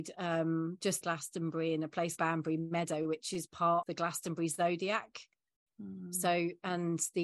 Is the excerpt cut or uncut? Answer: cut